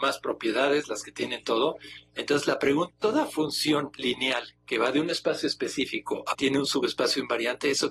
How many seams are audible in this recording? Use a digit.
2